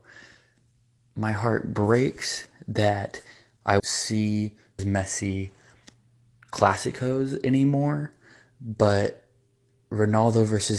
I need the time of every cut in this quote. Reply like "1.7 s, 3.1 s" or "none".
3.8 s, 4.8 s